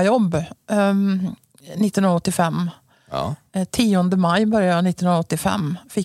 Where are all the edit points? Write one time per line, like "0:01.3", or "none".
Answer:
none